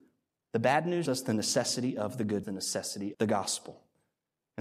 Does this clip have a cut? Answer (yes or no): yes